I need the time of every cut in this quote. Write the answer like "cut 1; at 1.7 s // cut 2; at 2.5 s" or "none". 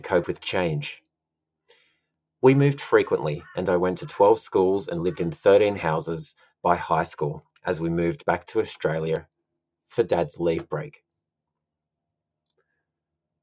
none